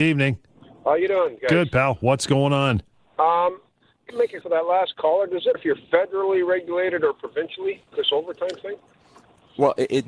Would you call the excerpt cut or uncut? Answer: cut